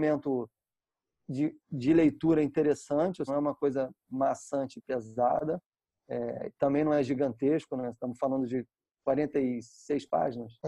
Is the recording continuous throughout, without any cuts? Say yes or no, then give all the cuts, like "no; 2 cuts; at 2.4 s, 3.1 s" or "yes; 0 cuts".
no; 2 cuts; at 1.6 s, 3.3 s